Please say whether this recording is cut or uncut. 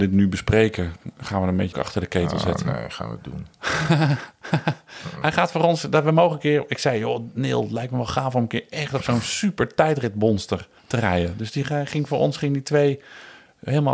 cut